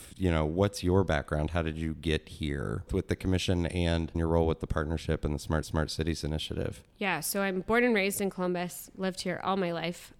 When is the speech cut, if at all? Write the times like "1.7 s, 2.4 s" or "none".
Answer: 2.9 s, 4.1 s, 5.6 s

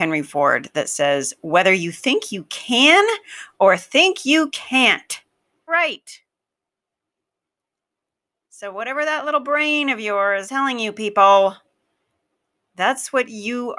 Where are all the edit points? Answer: 5.7 s, 10.4 s

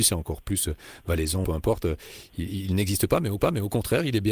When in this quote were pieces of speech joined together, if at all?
1.4 s, 3.4 s

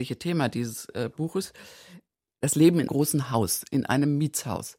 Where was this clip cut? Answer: 2.9 s

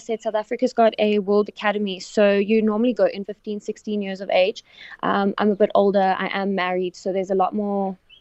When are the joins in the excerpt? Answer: 1.5 s, 3.2 s

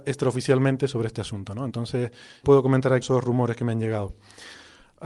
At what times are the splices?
2.4 s, 3.0 s

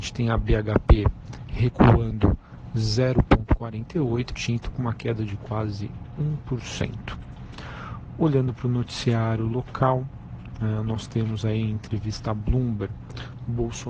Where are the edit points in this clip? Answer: 4.3 s

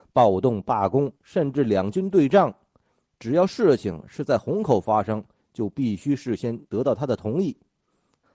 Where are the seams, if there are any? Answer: 1.1 s, 6.7 s

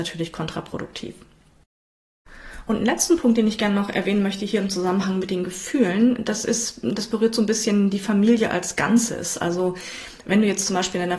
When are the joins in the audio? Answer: none

